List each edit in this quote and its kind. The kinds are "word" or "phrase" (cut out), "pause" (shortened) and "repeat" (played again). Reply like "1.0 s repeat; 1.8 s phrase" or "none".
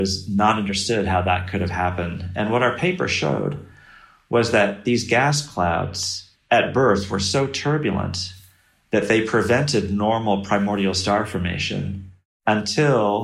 none